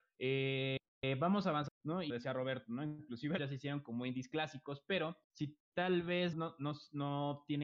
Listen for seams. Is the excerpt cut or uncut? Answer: cut